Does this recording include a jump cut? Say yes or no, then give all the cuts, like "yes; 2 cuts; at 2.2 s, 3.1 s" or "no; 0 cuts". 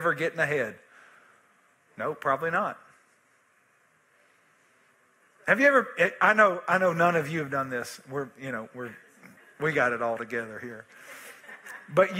no; 0 cuts